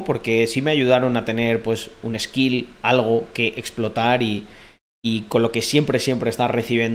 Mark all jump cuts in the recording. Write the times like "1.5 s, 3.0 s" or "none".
none

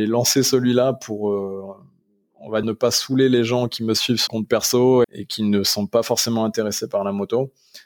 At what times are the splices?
2.6 s, 4.3 s, 5.0 s

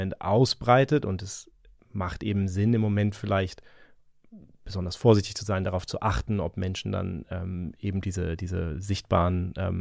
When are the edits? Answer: none

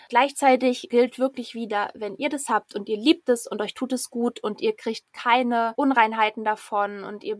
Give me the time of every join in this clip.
none

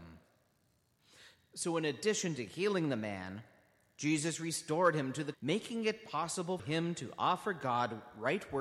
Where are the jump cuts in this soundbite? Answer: 5.3 s, 6.6 s

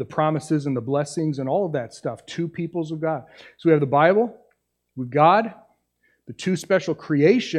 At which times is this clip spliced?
none

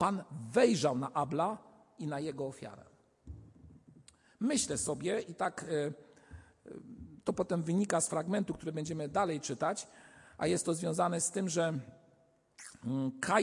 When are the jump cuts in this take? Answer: none

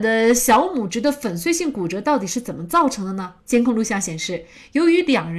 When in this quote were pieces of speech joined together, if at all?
3.4 s

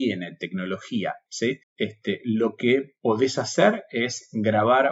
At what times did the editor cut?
1.3 s, 1.6 s

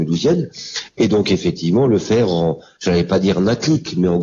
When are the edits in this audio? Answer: none

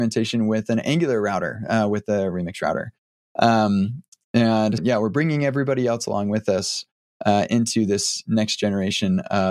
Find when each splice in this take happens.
4.8 s

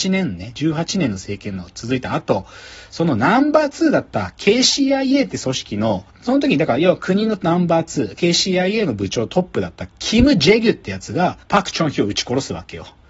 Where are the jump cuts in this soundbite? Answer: 6.1 s, 11.4 s

